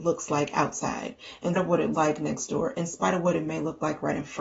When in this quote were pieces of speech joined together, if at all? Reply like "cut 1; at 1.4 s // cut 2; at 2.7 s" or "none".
cut 1; at 1.6 s // cut 2; at 1.9 s